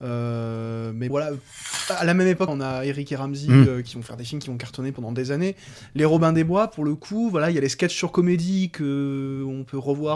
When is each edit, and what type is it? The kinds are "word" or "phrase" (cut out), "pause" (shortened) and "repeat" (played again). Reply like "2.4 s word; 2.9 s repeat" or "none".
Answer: 1.1 s word; 2.5 s phrase